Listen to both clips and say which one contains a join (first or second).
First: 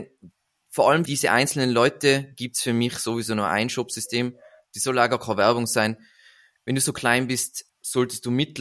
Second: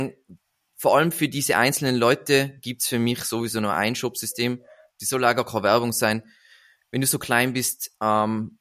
first